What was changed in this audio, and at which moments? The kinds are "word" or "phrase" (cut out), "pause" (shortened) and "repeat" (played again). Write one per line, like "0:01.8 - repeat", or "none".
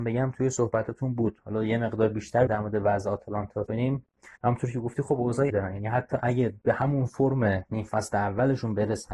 0:02.5 - word
0:03.7 - word
0:04.4 - pause
0:05.5 - word